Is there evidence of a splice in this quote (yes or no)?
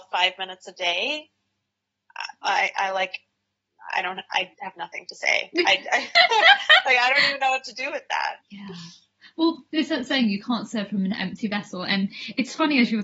yes